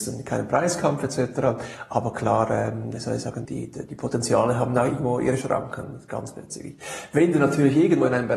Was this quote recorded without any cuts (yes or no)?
no